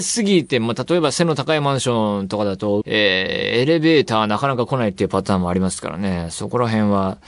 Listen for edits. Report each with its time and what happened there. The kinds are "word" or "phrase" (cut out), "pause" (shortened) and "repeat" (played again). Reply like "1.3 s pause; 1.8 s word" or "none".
2.8 s phrase